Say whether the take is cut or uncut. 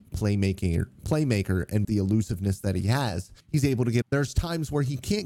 cut